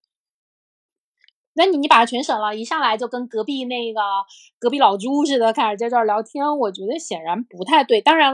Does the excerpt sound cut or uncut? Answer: uncut